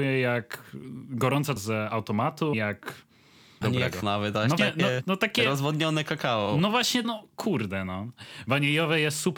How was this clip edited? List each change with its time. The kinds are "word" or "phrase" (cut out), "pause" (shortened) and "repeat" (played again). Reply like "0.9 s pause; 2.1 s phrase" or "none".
1.6 s word; 2.5 s word; 3.6 s word; 4.0 s word; 4.6 s word; 5.0 s word; 7.0 s word

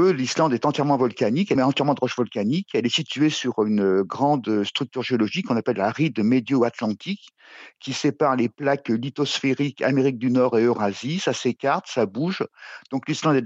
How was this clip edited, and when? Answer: 1.6 s phrase

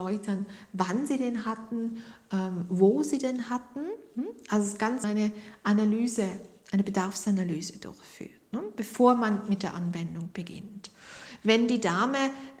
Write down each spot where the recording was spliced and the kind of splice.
5.0 s phrase

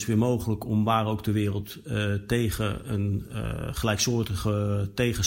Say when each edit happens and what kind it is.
none

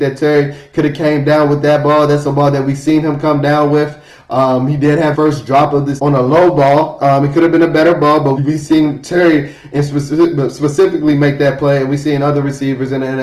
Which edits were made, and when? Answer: 5.1 s word; 6.0 s word; 8.4 s word

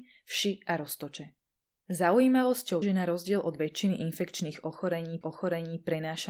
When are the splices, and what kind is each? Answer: 2.8 s word; 5.2 s repeat

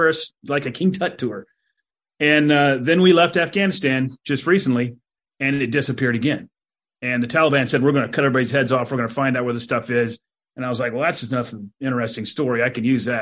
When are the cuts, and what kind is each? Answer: none

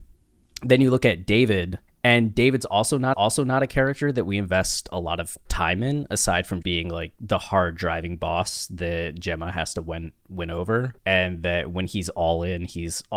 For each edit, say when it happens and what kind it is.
1.9 s pause; 3.1 s repeat; 5.5 s pause; 6.6 s word; 11.0 s pause

